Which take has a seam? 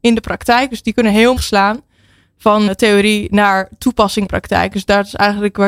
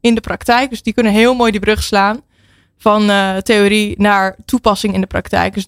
first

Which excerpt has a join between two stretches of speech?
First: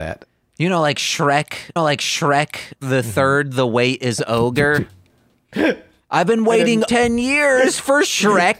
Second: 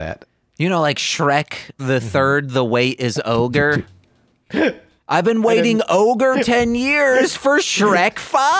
first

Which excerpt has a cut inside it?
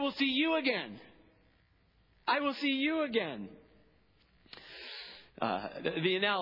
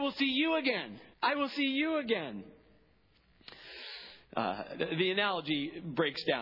second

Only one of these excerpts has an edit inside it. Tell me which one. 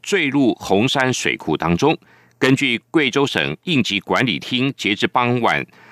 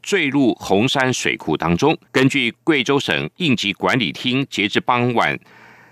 second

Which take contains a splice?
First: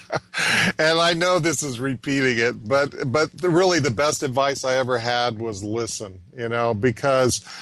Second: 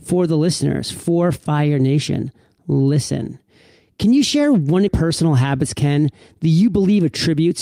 second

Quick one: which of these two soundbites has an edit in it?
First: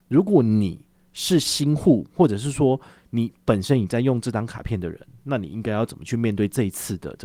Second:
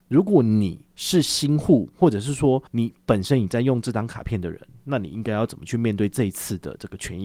second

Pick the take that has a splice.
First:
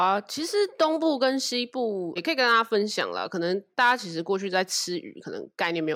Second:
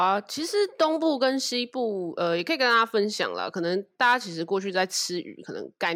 first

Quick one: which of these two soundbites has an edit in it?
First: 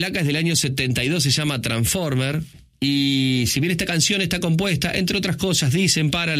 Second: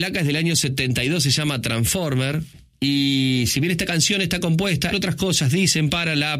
second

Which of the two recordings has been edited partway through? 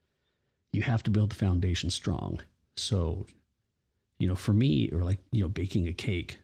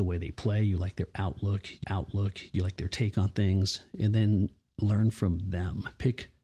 second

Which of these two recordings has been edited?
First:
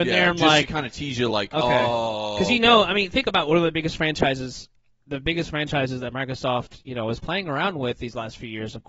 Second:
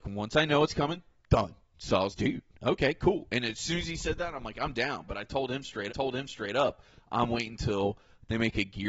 second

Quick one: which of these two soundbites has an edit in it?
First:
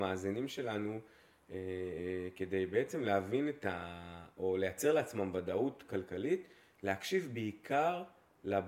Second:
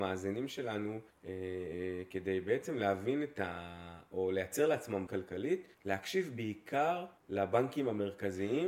second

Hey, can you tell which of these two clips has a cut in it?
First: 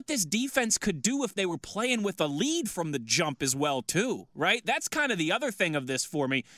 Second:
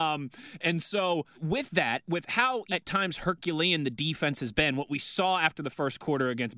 second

